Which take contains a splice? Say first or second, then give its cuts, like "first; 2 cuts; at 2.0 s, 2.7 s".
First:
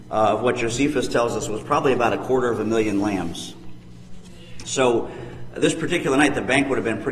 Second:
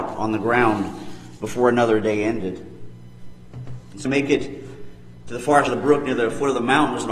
second; 2 cuts; at 4.0 s, 5.7 s